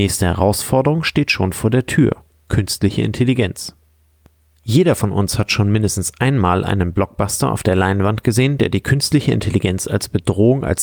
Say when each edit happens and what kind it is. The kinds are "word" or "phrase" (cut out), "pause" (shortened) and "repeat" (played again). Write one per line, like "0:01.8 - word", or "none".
none